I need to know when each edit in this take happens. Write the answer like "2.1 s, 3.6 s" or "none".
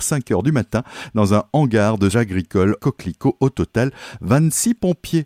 2.1 s, 2.8 s